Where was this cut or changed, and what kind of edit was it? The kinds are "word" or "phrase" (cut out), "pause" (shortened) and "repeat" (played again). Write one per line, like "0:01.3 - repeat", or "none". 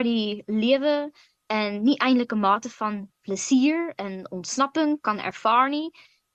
none